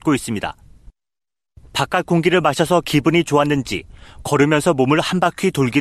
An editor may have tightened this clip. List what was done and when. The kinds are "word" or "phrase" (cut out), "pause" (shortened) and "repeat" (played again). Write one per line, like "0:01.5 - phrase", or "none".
none